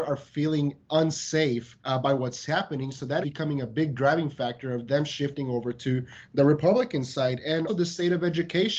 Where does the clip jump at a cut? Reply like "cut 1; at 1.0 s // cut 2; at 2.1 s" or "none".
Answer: cut 1; at 1.8 s // cut 2; at 3.2 s // cut 3; at 7.7 s